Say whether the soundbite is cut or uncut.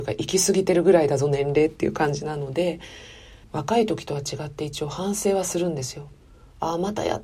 cut